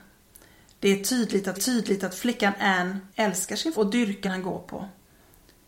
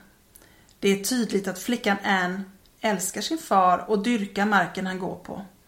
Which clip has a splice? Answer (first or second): first